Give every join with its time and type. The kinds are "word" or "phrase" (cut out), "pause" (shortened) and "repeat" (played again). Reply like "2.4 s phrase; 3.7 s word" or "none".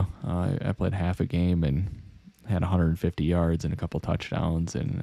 none

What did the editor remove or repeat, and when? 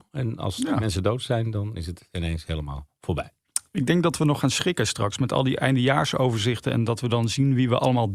none

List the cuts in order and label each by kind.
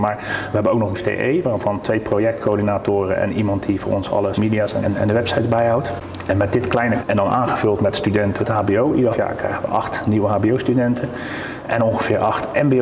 0.9 s word; 4.3 s word; 4.8 s word; 7.0 s word; 8.4 s word; 9.1 s word

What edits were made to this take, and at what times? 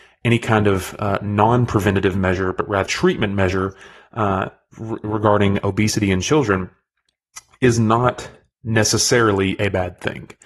2.9 s word

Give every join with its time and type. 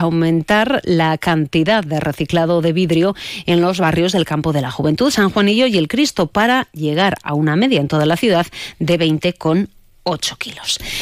none

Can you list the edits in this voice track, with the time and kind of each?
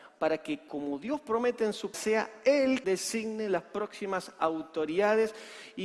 1.9 s word; 2.8 s word

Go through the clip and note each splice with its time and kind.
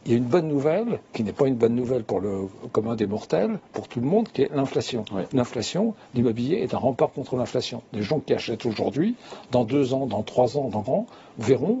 10.9 s word

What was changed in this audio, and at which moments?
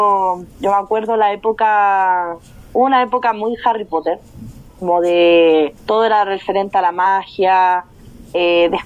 4.7 s pause; 5.8 s pause

